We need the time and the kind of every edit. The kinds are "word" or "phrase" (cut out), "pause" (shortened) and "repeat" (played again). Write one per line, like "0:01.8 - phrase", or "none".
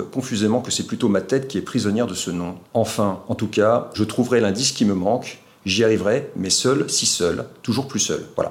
none